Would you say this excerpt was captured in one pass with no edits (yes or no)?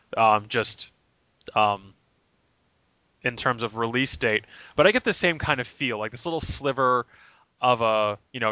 yes